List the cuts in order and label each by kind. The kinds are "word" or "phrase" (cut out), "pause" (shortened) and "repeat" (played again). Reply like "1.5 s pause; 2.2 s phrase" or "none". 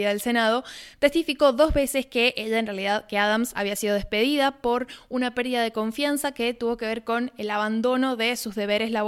none